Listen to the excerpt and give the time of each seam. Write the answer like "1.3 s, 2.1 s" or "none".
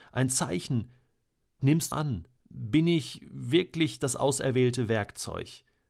1.6 s, 1.9 s, 2.4 s